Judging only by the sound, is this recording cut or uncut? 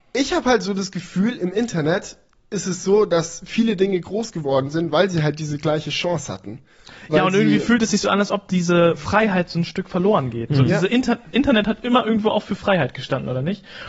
uncut